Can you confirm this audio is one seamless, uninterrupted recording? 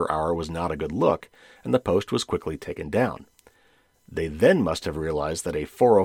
yes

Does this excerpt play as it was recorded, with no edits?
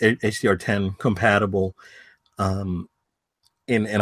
yes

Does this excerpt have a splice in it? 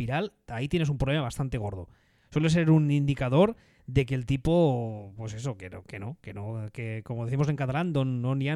no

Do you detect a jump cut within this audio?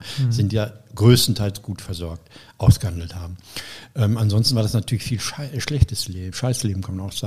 yes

